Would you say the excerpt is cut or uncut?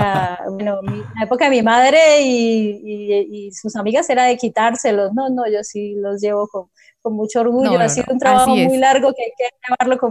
uncut